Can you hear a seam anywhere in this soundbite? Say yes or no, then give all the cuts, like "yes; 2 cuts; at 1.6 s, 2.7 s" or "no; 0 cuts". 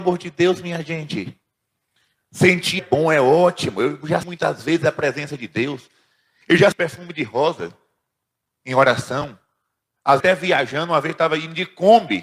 yes; 4 cuts; at 2.8 s, 4.2 s, 6.7 s, 10.2 s